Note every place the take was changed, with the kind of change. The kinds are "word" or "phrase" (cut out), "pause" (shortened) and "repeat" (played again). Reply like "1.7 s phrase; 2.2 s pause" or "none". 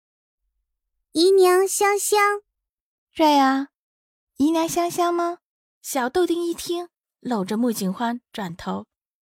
2.8 s pause; 5.6 s pause